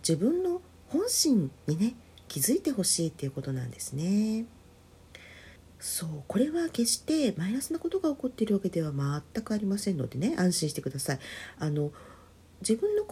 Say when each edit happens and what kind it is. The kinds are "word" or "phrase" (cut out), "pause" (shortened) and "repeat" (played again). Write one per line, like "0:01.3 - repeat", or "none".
0:01.6 - pause
0:05.6 - pause